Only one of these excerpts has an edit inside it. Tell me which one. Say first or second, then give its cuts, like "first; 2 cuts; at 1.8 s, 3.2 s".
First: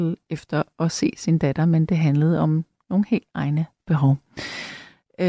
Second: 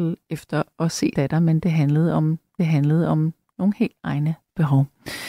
second; 2 cuts; at 1.1 s, 2.6 s